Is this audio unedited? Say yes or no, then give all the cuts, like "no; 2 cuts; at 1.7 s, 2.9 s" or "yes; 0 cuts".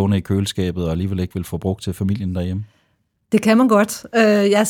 yes; 0 cuts